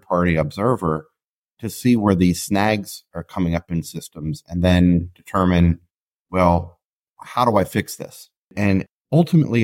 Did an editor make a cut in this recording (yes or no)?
no